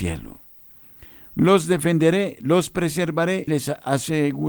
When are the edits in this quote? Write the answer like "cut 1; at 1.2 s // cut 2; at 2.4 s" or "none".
cut 1; at 3.5 s